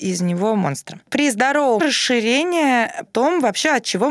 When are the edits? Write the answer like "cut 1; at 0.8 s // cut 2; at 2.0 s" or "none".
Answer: cut 1; at 1.8 s // cut 2; at 3.1 s